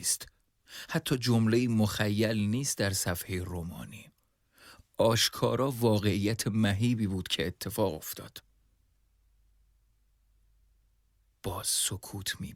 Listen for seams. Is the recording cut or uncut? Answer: uncut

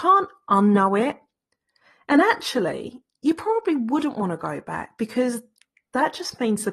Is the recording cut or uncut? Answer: uncut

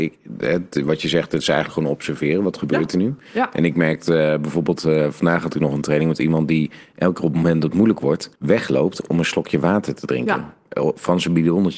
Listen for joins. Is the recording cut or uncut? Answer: cut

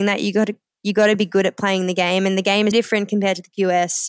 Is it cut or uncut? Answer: cut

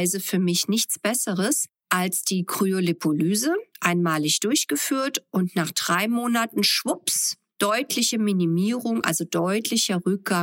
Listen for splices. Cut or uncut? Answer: uncut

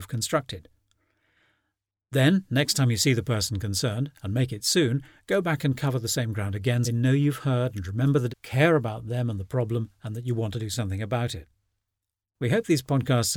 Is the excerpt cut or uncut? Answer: cut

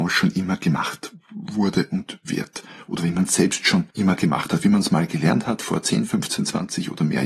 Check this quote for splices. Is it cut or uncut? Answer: cut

